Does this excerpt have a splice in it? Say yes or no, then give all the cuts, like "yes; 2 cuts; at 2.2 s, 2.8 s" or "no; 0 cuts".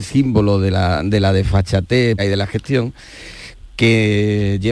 yes; 1 cut; at 2.2 s